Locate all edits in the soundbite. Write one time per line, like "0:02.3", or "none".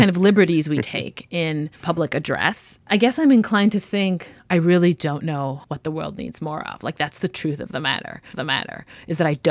0:01.7
0:04.4
0:05.6
0:08.3